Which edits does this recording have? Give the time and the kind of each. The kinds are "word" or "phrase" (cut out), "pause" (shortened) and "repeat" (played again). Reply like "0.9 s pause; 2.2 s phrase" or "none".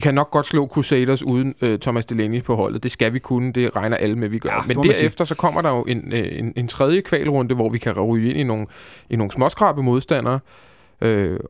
none